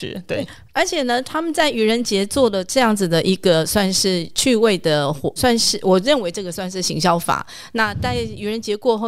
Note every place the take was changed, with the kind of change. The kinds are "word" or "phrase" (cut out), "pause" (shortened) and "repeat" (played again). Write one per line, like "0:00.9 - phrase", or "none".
0:05.4 - word